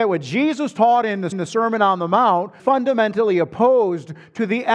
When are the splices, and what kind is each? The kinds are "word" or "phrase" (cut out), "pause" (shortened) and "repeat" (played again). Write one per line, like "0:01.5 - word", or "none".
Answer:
0:01.3 - repeat
0:02.6 - word